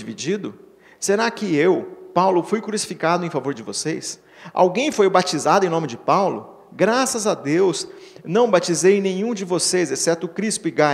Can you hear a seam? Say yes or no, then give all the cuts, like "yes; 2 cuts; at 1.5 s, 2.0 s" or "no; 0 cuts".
no; 0 cuts